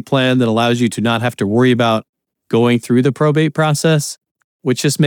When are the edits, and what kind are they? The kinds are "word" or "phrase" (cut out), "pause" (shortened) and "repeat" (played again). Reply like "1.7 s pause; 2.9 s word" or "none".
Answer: none